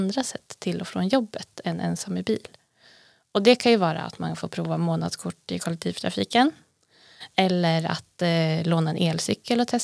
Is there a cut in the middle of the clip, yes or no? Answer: no